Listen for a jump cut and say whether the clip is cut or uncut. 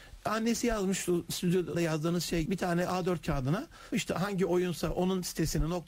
cut